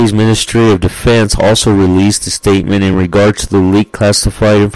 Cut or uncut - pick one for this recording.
uncut